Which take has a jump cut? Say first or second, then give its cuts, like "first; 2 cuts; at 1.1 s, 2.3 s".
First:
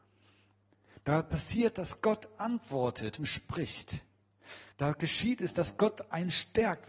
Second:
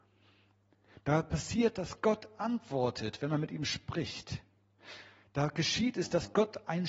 first; 2 cuts; at 3.2 s, 4.7 s